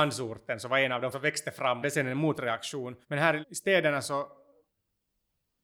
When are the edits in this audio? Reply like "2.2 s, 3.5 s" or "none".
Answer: 1.1 s, 1.8 s, 3.0 s, 3.4 s

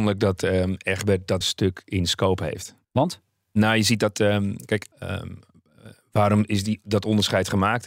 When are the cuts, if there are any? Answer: 1.4 s, 2.8 s, 4.9 s

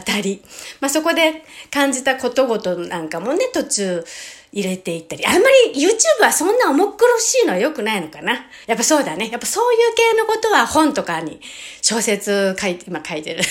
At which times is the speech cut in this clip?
8.6 s

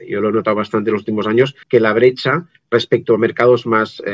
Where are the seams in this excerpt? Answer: 1.6 s

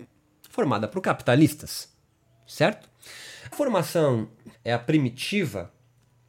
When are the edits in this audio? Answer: 3.5 s, 4.5 s

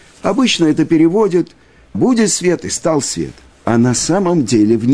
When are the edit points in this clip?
1.9 s, 3.5 s

